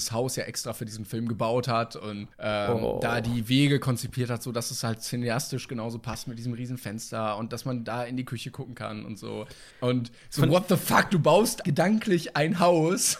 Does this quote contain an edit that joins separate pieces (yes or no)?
yes